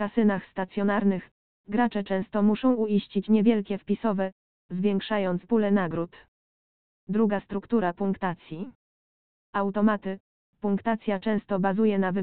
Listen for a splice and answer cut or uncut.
uncut